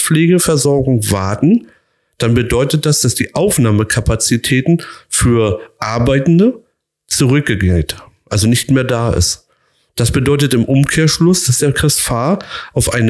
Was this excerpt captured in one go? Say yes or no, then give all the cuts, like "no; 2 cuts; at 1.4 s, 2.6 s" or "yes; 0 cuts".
yes; 0 cuts